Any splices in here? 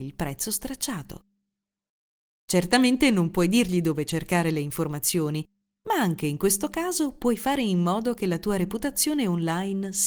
no; 0 cuts

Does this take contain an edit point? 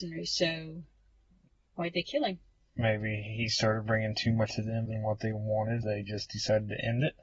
yes; 3 cuts; at 4.5 s, 4.9 s, 5.8 s

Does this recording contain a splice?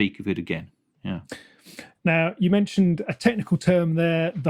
yes; 1 cut; at 3.0 s

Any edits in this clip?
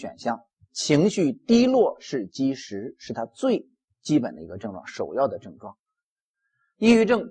no; 0 cuts

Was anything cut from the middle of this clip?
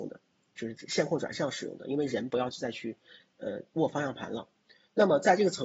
no; 0 cuts

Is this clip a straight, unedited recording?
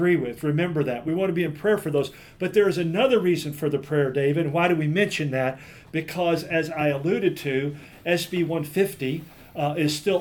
yes; 0 cuts

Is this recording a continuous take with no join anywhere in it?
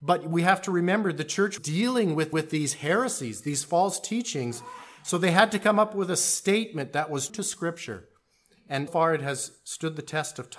no; 4 cuts; at 1.6 s, 2.3 s, 7.3 s, 8.9 s

